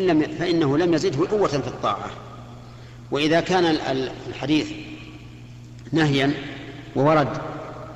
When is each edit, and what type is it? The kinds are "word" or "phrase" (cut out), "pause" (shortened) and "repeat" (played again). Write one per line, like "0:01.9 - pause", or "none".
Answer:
0:01.3 - word